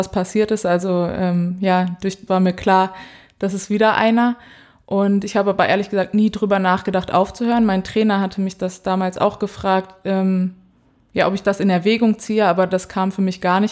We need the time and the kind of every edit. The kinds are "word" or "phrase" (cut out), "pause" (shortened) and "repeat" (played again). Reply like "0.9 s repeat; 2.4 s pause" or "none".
2.3 s phrase